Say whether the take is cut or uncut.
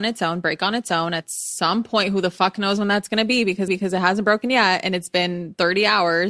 cut